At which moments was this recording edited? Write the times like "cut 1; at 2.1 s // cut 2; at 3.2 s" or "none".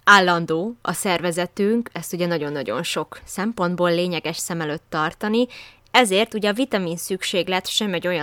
none